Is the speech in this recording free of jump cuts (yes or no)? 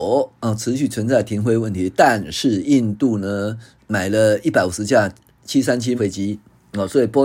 no